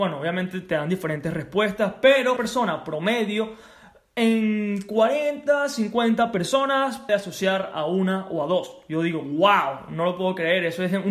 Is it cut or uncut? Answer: cut